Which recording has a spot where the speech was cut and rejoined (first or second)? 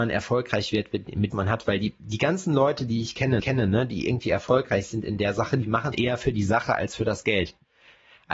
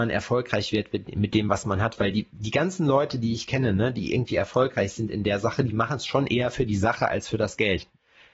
first